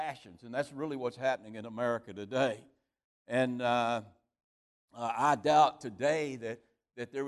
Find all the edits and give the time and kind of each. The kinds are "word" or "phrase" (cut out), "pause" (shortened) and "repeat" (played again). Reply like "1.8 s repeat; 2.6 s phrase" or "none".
none